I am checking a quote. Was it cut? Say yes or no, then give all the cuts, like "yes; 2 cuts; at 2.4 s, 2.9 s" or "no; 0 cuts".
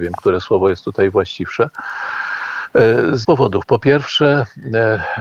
yes; 1 cut; at 3.2 s